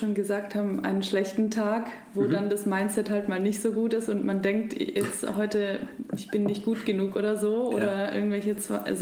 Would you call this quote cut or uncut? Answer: uncut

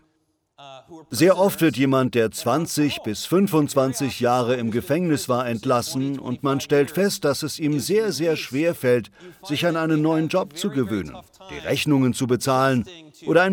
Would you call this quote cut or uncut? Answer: uncut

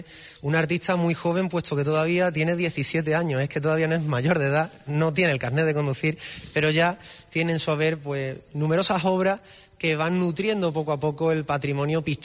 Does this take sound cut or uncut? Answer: uncut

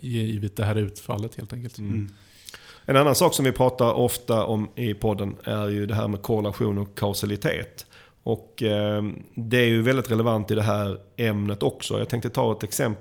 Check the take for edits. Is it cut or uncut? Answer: uncut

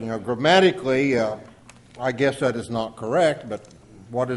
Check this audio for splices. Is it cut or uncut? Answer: uncut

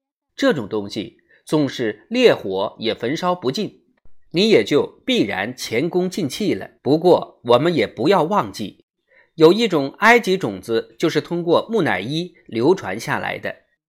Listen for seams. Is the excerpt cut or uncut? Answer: cut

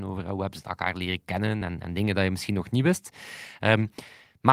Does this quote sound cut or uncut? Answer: uncut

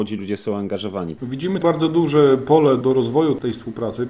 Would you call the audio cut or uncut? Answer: cut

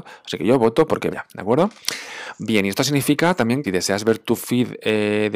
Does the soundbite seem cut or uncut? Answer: cut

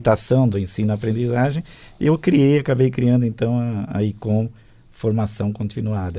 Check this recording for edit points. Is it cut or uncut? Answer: uncut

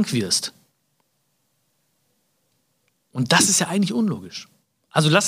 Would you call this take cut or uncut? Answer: uncut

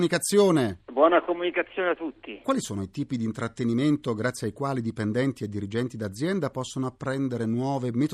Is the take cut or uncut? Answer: uncut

